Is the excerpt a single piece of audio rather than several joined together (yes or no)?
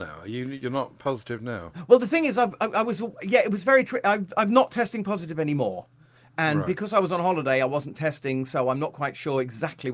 yes